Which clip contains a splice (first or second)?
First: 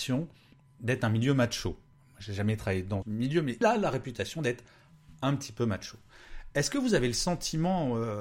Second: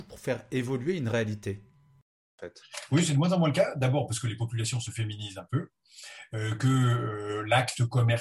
first